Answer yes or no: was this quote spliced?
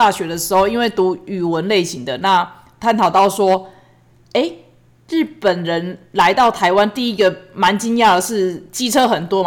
no